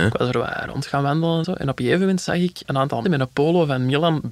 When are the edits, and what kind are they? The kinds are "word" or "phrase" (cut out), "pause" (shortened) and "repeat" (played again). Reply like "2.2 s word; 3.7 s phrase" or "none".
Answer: 1.4 s word; 2.6 s word; 3.0 s word